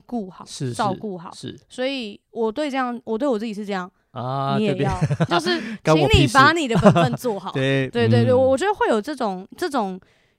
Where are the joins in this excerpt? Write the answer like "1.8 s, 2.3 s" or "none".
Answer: 2.2 s, 5.3 s